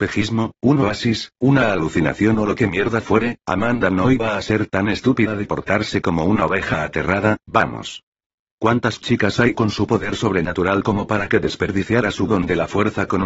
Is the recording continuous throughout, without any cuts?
yes; 0 cuts

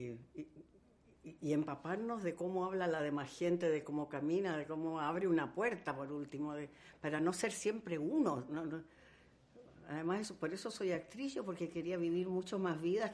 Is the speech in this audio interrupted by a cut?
no; 0 cuts

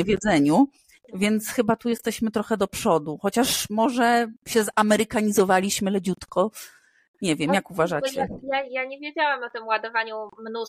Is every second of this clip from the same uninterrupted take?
yes; 0 cuts

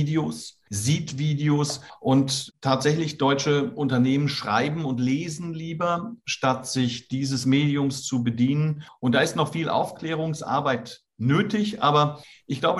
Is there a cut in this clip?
no; 0 cuts

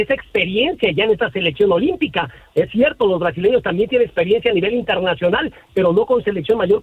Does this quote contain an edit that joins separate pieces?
no; 0 cuts

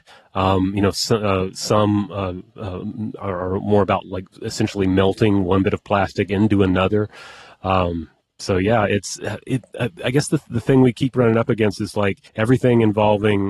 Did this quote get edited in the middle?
yes; 1 cut; at 12.3 s

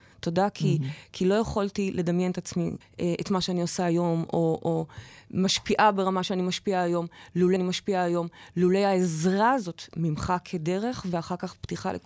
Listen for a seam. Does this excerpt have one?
yes; 2 cuts; at 2.8 s, 7.6 s

